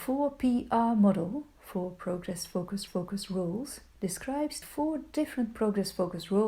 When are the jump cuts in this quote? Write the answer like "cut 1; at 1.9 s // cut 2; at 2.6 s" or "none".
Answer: cut 1; at 2.9 s // cut 2; at 4.6 s